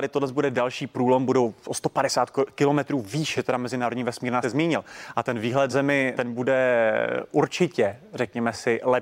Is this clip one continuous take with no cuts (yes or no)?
no